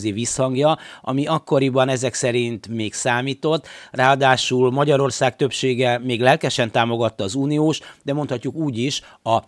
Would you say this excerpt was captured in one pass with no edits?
yes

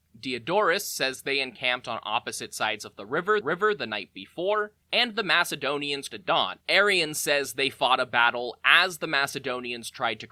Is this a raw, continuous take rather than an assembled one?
no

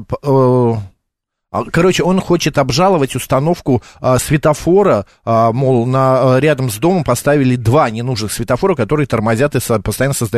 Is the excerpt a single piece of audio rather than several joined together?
yes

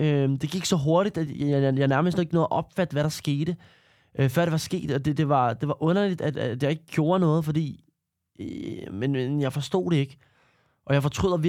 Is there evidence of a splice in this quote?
no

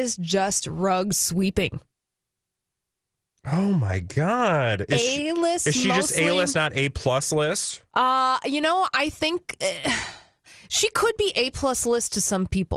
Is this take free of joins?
yes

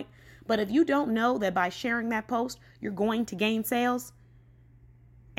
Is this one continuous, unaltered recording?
yes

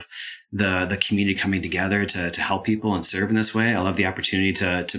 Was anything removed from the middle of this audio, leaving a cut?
no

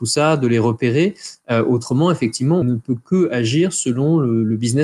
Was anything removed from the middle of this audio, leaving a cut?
yes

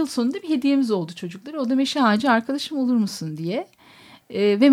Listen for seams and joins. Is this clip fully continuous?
yes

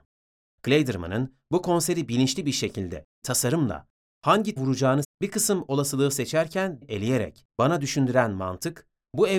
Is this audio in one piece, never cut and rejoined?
no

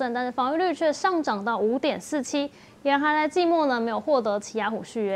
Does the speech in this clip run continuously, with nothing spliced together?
yes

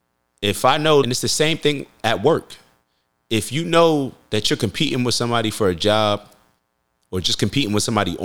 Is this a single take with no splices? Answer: no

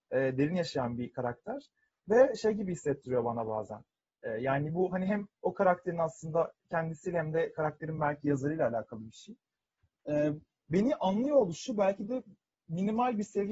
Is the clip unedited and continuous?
yes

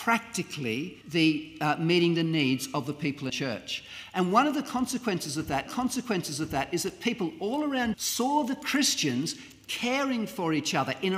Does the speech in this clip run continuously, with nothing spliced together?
no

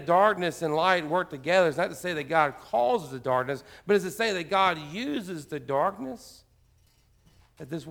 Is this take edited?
no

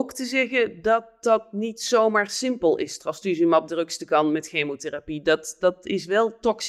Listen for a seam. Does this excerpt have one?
no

